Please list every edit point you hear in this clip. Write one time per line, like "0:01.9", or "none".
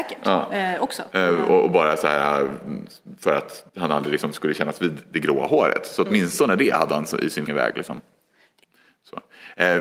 0:03.7
0:07.5